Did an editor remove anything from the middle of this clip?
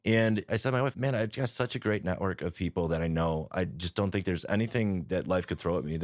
no; 0 cuts

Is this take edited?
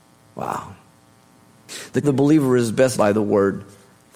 yes; 2 cuts; at 2.0 s, 2.9 s

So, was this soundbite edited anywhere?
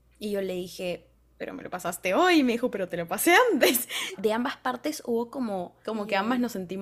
no; 0 cuts

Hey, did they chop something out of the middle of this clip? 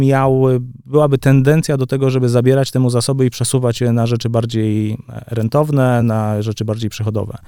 no; 0 cuts

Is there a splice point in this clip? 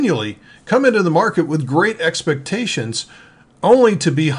no; 0 cuts

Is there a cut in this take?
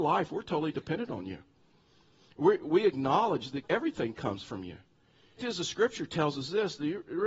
yes; 2 cuts; at 3.6 s, 5.4 s

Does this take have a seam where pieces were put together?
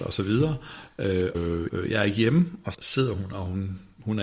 yes; 3 cuts; at 1.3 s, 1.7 s, 2.7 s

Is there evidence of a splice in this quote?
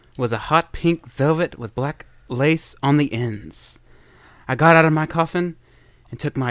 no; 0 cuts

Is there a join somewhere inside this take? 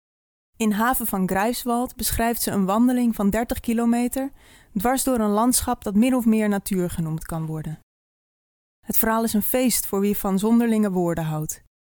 no; 0 cuts

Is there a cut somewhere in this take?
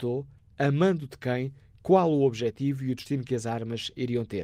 no; 0 cuts

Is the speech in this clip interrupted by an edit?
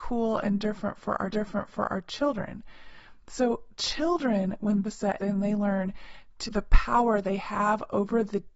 yes; 4 cuts; at 1.3 s, 4.8 s, 5.2 s, 6.5 s

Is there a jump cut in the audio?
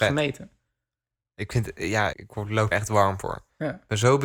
yes; 2 cuts; at 2.1 s, 2.7 s

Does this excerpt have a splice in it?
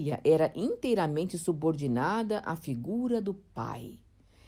no; 0 cuts

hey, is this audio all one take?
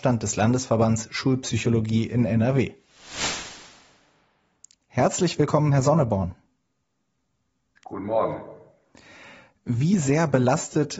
yes; 0 cuts

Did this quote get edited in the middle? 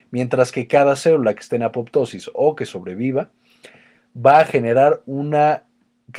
no; 0 cuts

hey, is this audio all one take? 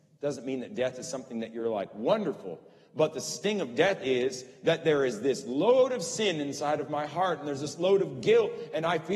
yes; 0 cuts

